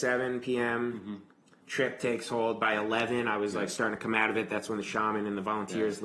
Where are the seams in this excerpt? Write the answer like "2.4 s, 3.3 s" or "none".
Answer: 1.6 s